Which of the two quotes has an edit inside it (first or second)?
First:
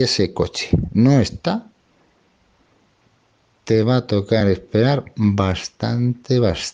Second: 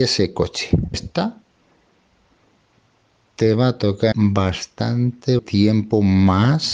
second